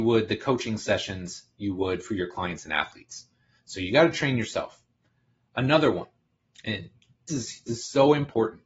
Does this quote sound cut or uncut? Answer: cut